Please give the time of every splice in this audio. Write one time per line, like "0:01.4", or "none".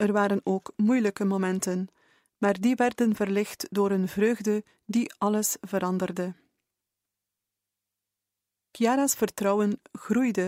none